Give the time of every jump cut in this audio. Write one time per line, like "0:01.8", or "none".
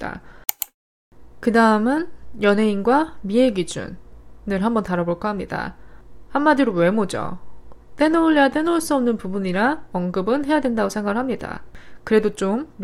none